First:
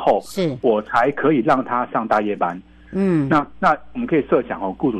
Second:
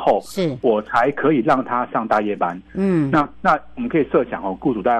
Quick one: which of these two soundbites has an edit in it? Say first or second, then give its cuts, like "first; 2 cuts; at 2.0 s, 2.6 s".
second; 1 cut; at 2.6 s